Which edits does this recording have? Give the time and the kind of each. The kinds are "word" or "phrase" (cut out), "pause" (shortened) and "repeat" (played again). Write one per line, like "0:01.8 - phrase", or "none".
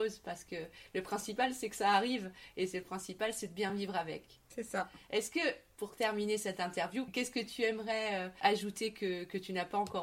none